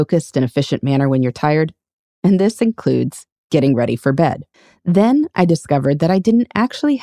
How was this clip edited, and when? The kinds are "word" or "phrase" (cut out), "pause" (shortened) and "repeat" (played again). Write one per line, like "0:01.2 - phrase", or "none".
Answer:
0:04.5 - pause